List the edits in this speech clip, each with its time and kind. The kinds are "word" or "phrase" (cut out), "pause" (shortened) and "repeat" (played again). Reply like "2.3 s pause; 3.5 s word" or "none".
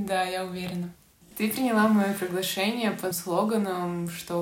3.1 s word